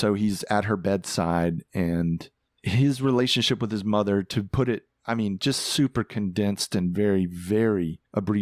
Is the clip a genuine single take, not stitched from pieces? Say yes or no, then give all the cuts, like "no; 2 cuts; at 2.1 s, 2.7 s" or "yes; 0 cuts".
yes; 0 cuts